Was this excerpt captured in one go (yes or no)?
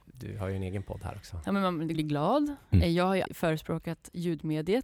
no